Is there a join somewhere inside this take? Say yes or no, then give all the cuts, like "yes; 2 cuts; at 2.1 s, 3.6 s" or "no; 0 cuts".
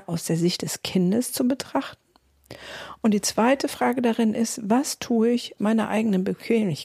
yes; 1 cut; at 5.6 s